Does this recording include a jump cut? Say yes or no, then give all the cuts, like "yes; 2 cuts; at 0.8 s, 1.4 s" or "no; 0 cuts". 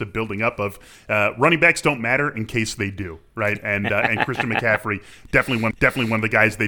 yes; 1 cut; at 5.7 s